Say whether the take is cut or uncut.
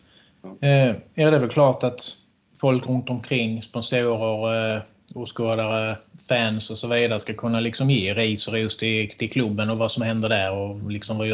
uncut